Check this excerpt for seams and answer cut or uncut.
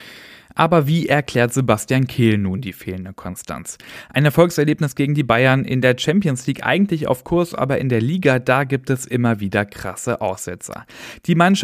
uncut